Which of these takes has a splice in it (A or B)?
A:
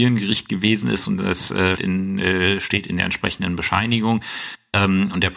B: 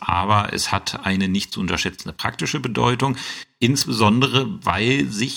A